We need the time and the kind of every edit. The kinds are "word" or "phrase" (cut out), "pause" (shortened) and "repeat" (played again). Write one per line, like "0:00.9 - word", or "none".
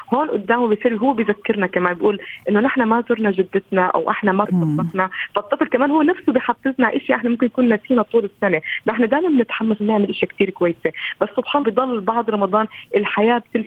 0:04.4 - word
0:09.8 - word
0:11.6 - word